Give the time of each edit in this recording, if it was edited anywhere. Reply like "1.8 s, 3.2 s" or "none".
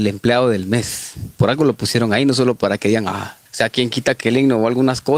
3.4 s